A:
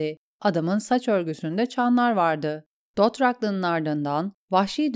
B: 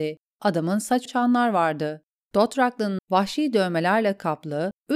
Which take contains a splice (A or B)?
B